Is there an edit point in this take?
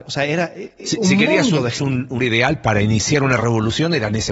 yes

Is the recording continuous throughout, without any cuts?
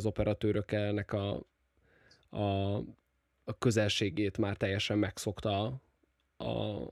yes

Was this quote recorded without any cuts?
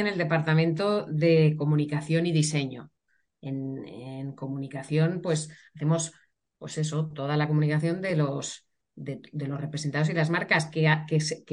yes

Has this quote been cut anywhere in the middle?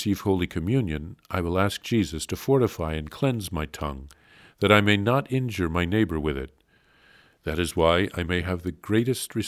no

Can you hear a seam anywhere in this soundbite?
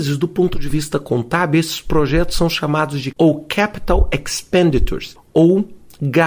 yes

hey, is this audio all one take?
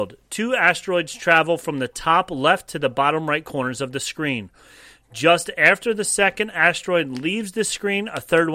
yes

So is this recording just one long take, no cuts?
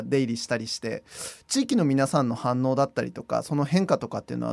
yes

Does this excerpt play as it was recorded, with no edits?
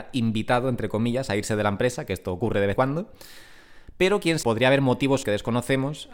no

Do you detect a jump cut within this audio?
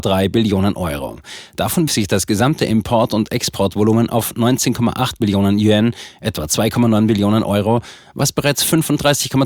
yes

